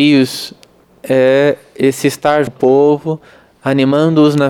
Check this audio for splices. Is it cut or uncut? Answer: cut